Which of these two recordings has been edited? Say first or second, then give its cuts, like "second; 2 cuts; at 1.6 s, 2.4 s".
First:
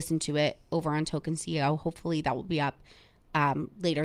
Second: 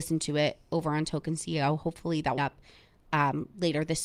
second; 1 cut; at 2.4 s